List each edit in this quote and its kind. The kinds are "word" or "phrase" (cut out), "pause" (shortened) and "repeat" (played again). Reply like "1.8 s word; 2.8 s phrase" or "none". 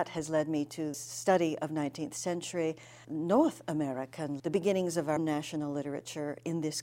0.9 s word; 3.0 s word; 4.4 s word; 5.2 s word